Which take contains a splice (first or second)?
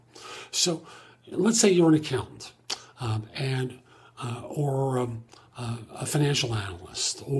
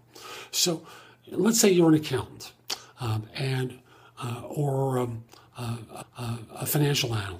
second